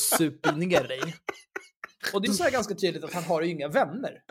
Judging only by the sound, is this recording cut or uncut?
cut